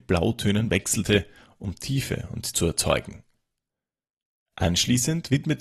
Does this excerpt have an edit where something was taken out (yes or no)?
yes